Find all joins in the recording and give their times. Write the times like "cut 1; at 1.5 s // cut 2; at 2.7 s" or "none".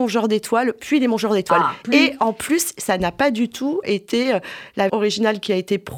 cut 1; at 3.8 s // cut 2; at 4.9 s